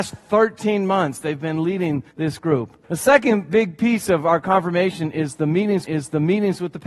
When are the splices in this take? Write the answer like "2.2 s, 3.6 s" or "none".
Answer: 2.1 s, 2.8 s, 5.8 s